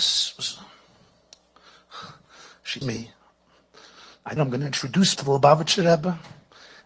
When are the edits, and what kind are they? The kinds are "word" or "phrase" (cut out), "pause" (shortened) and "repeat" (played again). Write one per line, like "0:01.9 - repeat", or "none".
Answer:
0:02.8 - word
0:04.4 - word
0:05.2 - word